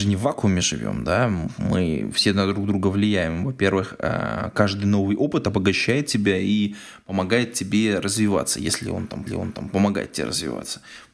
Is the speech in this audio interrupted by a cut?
yes; 1 cut; at 9.3 s

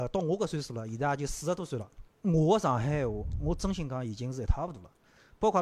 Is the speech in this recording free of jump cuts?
no; 1 cut; at 2.1 s

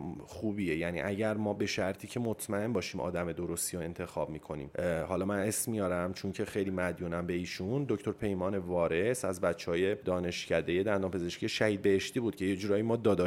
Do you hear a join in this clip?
no; 0 cuts

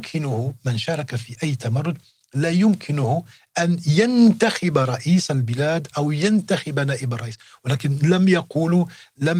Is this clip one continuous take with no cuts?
yes; 0 cuts

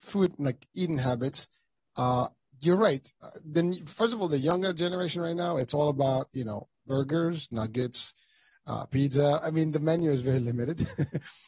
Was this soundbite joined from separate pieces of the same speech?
yes; 1 cut; at 3.2 s

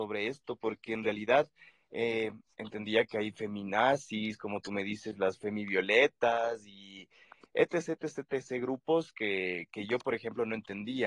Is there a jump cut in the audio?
no; 0 cuts

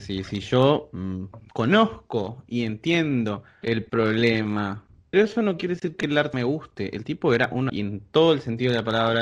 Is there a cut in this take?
yes; 4 cuts; at 1.5 s, 5.1 s, 6.3 s, 7.7 s

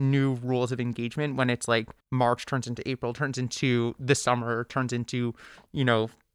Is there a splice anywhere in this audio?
yes; 1 cut; at 2.0 s

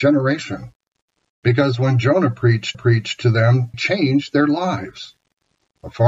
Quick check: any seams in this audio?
yes; 2 cuts; at 2.7 s, 3.7 s

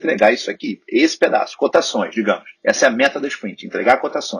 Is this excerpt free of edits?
no; 1 cut; at 2.6 s

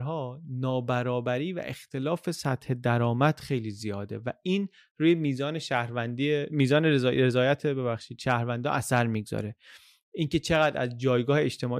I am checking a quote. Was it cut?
no; 0 cuts

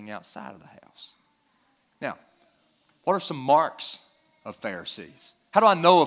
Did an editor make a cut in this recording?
no; 0 cuts

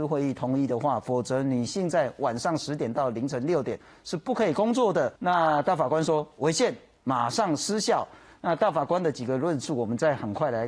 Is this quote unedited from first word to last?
no; 1 cut; at 5.2 s

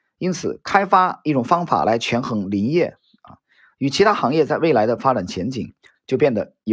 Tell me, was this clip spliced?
no; 0 cuts

